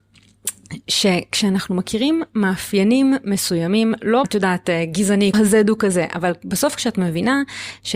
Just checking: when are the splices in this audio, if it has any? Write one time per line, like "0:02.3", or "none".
0:04.2
0:05.3